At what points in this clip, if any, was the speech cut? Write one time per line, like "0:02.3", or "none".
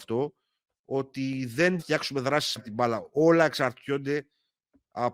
0:01.8
0:02.6